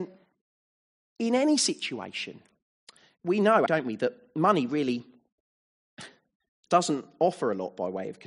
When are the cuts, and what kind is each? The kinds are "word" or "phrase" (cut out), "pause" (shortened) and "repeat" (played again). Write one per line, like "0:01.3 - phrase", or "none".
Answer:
0:02.6 - pause
0:03.7 - word